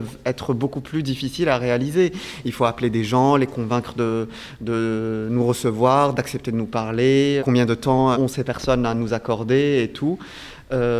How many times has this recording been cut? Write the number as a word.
two